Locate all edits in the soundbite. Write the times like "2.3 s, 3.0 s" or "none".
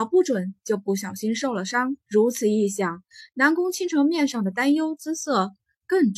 2.0 s